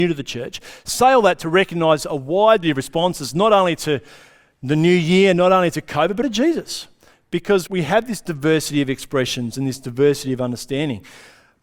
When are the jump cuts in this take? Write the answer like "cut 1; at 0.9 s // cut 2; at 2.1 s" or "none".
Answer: cut 1; at 2.6 s // cut 2; at 6.2 s // cut 3; at 7.7 s